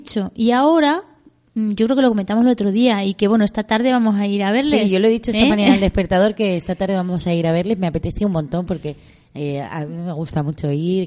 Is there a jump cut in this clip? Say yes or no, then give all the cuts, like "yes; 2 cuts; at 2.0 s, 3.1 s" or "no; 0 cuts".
no; 0 cuts